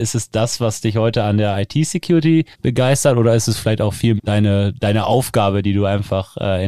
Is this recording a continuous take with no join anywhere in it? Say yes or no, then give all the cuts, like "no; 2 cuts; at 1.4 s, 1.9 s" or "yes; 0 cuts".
no; 2 cuts; at 2.5 s, 4.2 s